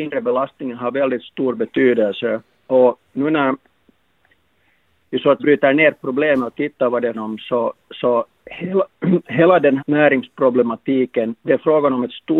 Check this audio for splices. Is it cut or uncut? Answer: cut